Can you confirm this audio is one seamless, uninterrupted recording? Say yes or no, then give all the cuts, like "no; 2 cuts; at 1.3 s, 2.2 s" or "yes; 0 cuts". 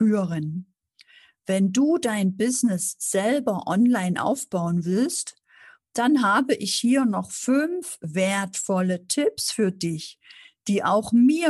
yes; 0 cuts